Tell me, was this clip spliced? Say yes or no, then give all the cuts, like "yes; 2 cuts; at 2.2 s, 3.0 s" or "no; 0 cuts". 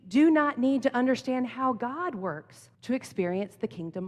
yes; 1 cut; at 2.7 s